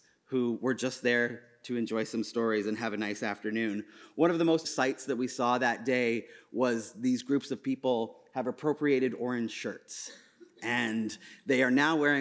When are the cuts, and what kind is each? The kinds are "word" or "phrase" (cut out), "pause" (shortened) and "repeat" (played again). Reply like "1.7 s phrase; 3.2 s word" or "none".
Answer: 4.6 s word